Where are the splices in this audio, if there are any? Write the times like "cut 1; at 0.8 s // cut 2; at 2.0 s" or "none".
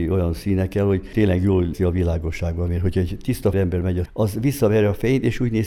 cut 1; at 1.7 s // cut 2; at 3.5 s // cut 3; at 4.1 s